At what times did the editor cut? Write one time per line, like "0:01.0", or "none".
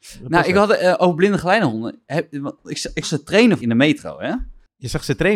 0:03.0
0:03.6